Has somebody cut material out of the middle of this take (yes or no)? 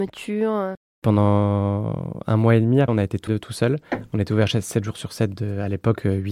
yes